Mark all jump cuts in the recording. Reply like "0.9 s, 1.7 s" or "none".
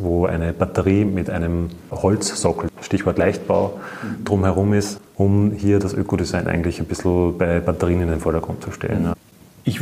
none